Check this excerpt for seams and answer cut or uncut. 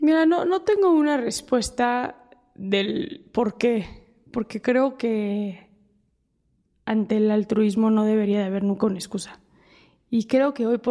uncut